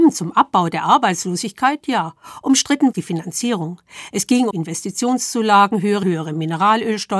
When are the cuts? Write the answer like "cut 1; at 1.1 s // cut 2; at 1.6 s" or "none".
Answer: cut 1; at 2.9 s // cut 2; at 4.5 s // cut 3; at 6.0 s